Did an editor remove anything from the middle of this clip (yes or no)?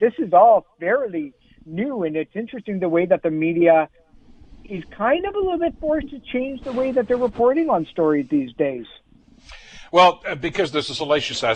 no